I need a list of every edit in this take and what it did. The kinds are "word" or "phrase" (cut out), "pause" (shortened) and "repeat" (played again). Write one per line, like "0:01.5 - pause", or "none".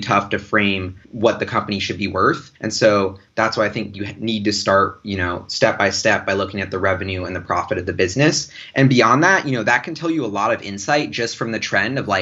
0:01.0 - pause
0:02.6 - pause